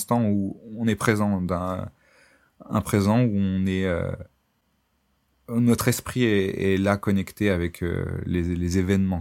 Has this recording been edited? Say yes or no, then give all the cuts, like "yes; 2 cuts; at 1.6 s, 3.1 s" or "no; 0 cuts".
no; 0 cuts